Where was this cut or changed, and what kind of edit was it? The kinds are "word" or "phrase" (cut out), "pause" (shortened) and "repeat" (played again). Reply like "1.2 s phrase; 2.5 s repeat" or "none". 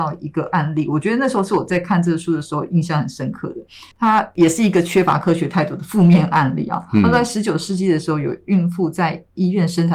3.9 s pause

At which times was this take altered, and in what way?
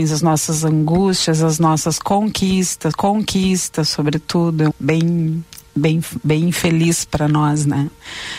2.9 s repeat; 4.7 s word

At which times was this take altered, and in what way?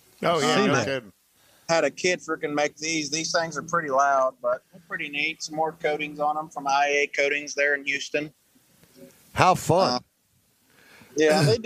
none

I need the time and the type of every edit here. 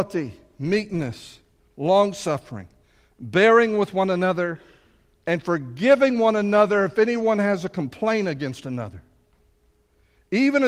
none

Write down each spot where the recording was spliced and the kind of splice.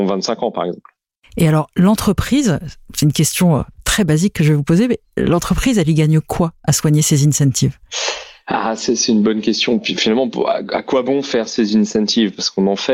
none

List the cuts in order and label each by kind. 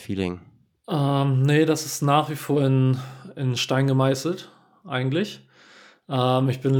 none

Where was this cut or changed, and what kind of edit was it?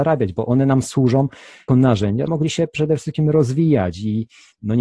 1.7 s word; 2.3 s word

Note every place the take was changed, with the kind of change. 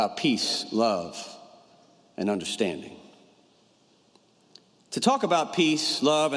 none

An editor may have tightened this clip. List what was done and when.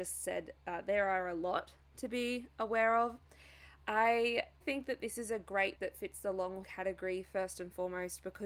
4.6 s word; 5.8 s word; 6.6 s word

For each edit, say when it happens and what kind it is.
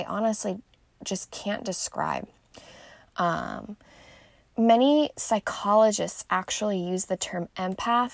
none

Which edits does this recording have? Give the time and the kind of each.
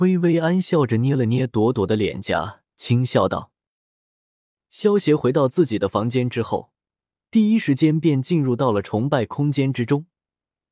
2.7 s pause

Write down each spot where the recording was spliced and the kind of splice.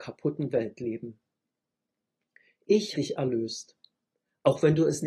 2.9 s word

